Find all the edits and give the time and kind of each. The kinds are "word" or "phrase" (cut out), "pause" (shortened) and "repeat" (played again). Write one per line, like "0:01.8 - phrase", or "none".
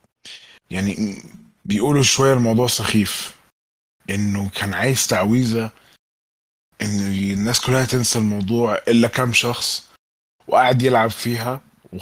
none